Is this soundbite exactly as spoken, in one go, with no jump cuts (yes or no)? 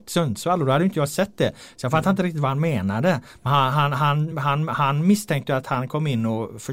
yes